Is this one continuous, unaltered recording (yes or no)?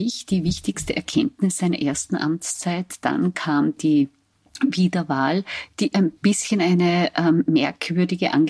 yes